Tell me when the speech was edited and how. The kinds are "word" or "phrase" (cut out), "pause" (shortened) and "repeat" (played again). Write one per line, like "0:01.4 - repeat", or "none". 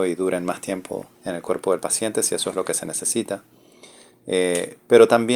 0:01.1 - pause